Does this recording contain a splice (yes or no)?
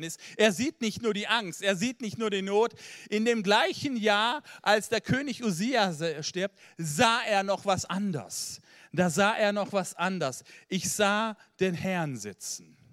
no